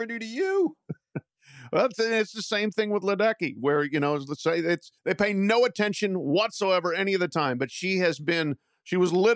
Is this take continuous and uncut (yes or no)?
no